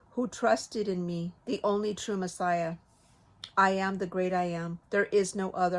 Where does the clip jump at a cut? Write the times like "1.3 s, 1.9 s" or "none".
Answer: 1.4 s, 4.8 s